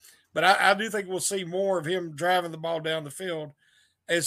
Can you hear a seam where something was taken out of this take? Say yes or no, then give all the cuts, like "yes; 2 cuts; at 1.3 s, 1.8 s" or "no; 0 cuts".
no; 0 cuts